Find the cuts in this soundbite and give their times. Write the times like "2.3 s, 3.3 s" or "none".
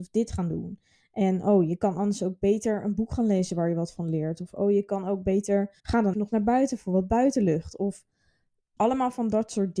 5.8 s, 6.1 s